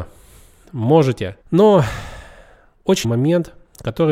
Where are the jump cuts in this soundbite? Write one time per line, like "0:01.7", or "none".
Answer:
0:01.4
0:03.0